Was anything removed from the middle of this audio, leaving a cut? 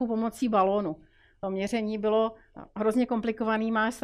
no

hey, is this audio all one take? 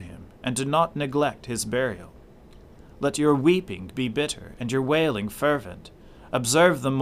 yes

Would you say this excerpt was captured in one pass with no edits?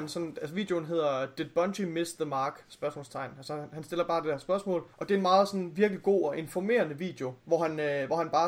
no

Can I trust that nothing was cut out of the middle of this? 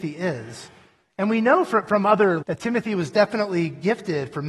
no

